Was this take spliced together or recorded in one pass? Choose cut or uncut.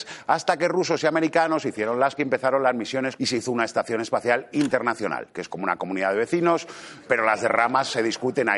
cut